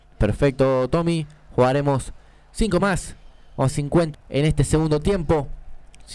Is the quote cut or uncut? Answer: cut